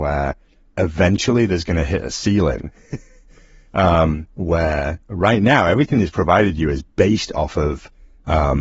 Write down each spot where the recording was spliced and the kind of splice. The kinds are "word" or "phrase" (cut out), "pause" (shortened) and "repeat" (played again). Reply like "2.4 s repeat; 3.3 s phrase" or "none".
none